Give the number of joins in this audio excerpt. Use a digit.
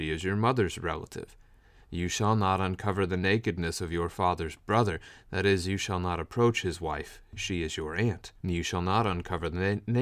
1